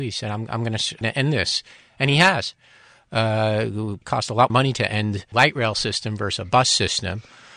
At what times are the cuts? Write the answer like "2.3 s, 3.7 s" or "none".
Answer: 1.0 s, 4.0 s, 4.5 s, 5.3 s